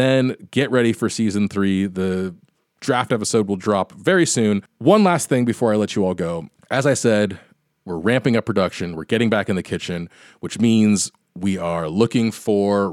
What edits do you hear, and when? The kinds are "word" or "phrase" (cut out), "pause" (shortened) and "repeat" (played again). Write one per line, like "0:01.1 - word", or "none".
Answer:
none